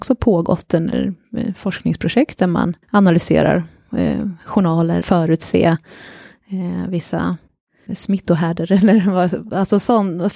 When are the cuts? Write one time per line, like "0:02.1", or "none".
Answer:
0:02.3
0:02.8
0:05.0
0:07.9